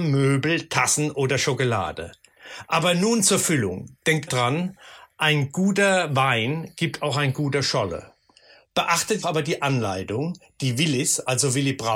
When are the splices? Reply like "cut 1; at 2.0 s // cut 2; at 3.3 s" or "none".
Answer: cut 1; at 4.3 s // cut 2; at 9.2 s